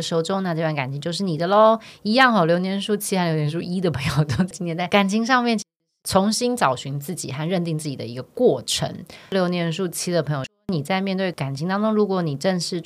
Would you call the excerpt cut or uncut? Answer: uncut